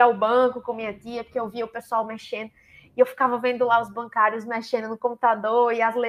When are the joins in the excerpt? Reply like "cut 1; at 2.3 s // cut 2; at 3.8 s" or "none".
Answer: none